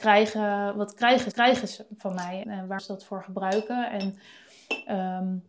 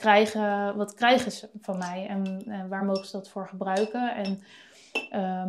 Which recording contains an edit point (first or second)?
first